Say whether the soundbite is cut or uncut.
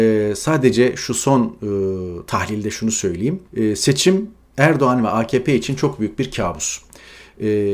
cut